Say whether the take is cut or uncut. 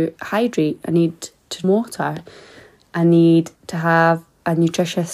cut